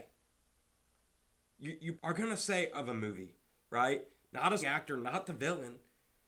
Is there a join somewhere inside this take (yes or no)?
yes